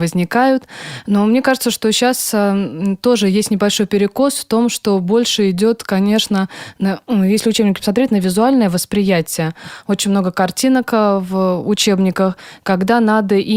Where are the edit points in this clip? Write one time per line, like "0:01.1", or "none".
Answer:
none